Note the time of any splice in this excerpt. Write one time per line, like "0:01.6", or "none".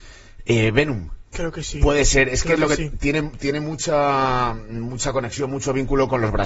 0:01.3